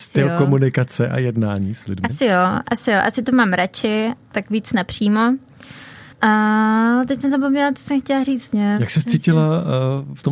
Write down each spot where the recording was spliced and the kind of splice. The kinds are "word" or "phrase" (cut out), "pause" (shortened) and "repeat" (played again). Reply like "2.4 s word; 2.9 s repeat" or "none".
6.1 s pause